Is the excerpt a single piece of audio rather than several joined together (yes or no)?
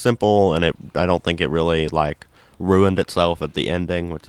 yes